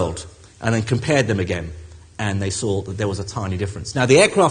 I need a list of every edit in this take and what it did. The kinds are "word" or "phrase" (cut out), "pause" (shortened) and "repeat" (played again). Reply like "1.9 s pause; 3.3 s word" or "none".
none